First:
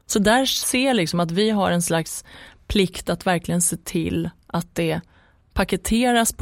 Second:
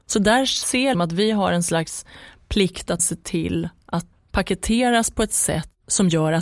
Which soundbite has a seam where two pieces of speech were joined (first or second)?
second